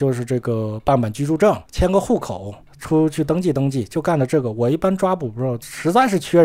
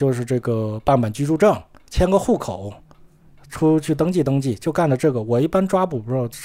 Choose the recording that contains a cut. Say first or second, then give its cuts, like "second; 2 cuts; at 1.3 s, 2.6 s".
first; 2 cuts; at 1.7 s, 2.6 s